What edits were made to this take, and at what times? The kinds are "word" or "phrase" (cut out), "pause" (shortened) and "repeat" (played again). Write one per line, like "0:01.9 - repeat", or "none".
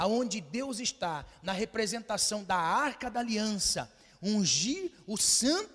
none